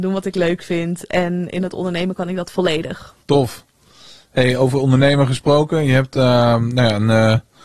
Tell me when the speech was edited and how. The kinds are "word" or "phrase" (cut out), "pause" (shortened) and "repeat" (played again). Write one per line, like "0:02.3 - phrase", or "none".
0:03.2 - pause